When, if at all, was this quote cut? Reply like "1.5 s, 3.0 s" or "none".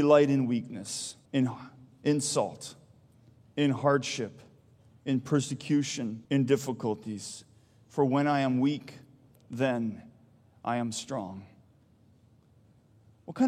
1.3 s, 6.2 s